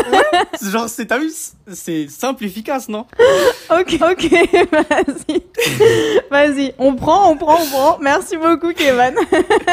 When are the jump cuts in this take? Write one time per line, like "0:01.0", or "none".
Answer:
0:04.0